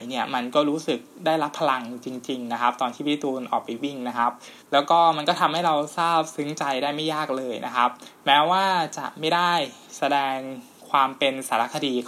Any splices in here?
yes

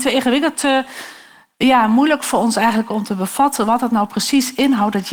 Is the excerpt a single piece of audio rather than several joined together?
yes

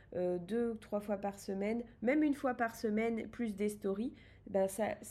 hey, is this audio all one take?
yes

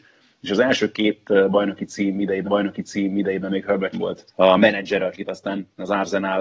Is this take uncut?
no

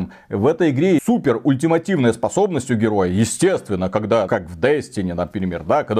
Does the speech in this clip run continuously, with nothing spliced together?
no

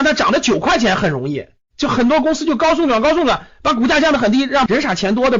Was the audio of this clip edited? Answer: no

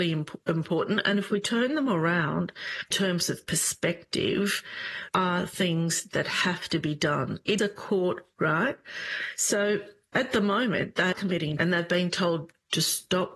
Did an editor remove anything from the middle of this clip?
yes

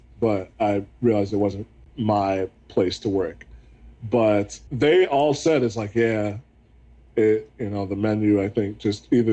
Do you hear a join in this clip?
no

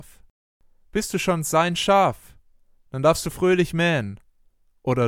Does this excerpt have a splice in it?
no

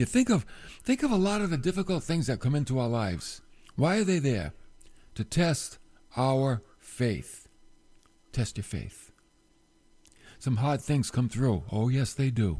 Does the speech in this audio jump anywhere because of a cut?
yes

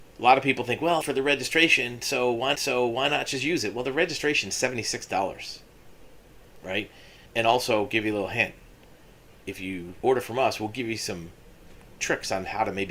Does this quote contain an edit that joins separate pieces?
yes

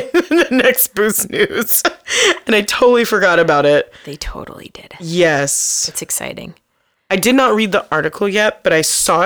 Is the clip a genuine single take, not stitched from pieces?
yes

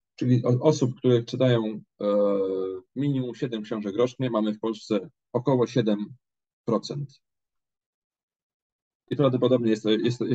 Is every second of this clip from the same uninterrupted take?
yes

